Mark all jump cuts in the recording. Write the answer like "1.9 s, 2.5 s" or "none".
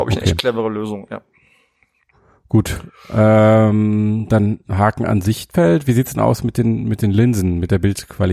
none